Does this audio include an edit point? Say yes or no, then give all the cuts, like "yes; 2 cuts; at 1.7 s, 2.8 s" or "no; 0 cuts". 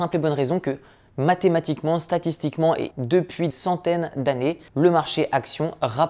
yes; 3 cuts; at 2.9 s, 3.5 s, 4.7 s